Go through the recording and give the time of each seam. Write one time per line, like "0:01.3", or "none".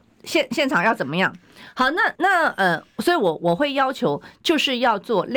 0:02.2